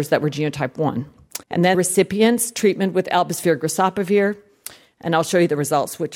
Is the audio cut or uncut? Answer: cut